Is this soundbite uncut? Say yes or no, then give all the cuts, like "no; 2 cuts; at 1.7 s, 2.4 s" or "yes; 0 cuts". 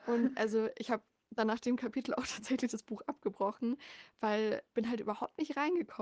no; 1 cut; at 4.7 s